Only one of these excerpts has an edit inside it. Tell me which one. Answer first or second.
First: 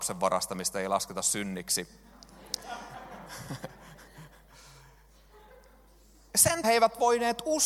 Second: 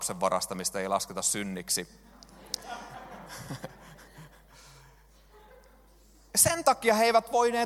first